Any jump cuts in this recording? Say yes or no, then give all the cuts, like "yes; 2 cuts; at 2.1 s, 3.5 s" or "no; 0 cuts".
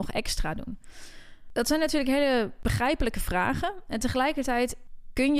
no; 0 cuts